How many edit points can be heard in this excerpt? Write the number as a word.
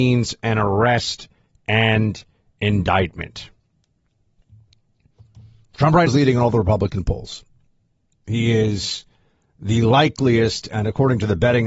one